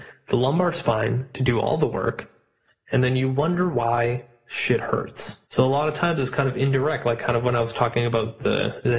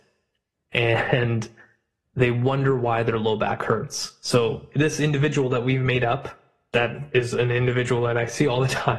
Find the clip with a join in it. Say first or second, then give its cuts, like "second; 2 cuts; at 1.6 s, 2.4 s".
first; 1 cut; at 5.4 s